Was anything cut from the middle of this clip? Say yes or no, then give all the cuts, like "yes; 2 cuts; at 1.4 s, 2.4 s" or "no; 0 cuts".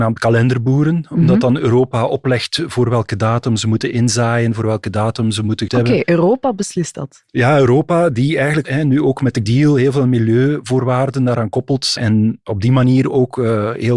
yes; 4 cuts; at 5.7 s, 8.6 s, 9.4 s, 12.0 s